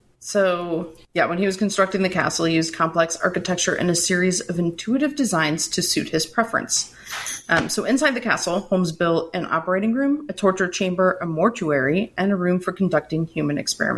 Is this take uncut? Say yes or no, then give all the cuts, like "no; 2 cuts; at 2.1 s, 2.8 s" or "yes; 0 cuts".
no; 1 cut; at 1.0 s